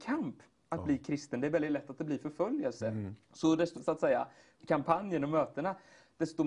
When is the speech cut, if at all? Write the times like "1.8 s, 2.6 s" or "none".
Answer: 3.2 s, 3.8 s, 4.6 s